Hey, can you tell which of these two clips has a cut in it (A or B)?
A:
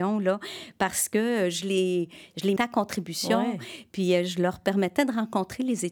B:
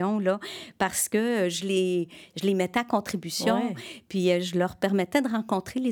A